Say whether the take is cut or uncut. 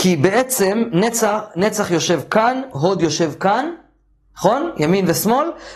uncut